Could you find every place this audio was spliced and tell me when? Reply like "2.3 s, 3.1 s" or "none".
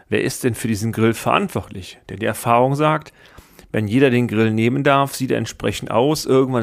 none